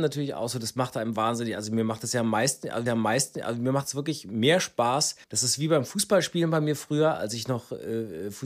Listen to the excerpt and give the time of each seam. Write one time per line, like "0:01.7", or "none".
0:02.9
0:05.2